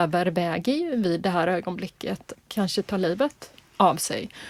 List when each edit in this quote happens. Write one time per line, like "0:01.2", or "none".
0:02.3

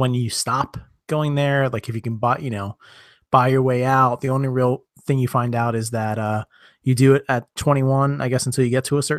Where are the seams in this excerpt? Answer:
0:01.0

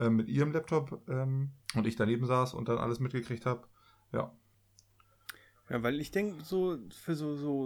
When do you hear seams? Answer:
0:01.6

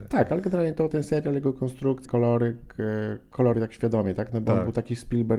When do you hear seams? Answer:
0:00.9
0:02.0
0:03.5

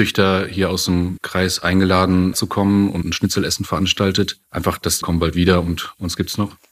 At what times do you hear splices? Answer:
0:01.2
0:02.3
0:03.0
0:04.4
0:05.0

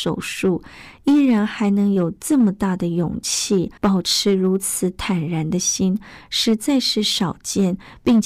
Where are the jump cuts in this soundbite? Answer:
0:03.8

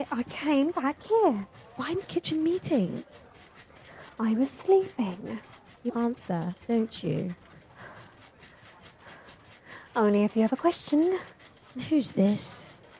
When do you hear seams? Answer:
0:02.1
0:05.9
0:06.6

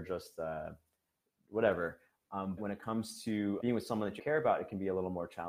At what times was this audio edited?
0:02.6
0:03.6
0:04.2

